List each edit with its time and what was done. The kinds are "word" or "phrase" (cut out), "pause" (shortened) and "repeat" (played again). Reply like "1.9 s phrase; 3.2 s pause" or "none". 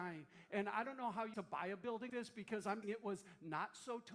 1.3 s phrase; 2.1 s word; 2.8 s word